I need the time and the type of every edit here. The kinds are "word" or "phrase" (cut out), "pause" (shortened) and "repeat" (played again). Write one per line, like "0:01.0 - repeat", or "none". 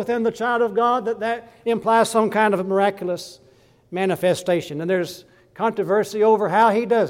none